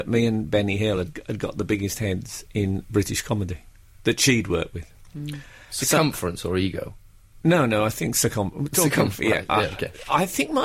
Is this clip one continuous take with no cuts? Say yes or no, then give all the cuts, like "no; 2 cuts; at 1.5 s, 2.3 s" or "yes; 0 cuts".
yes; 0 cuts